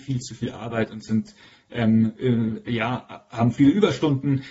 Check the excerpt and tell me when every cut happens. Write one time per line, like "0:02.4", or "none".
none